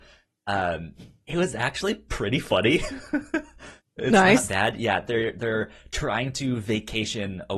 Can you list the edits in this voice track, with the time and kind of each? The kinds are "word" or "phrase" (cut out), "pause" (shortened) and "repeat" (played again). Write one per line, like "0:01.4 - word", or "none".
none